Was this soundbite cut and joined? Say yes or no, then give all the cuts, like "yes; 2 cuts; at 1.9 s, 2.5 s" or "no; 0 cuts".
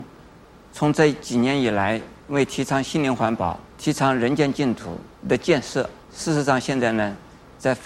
yes; 4 cuts; at 2.2 s, 3.7 s, 5.2 s, 6.0 s